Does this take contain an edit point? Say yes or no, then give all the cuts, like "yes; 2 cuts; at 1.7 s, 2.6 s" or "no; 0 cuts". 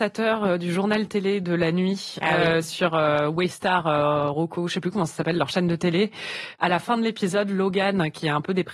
no; 0 cuts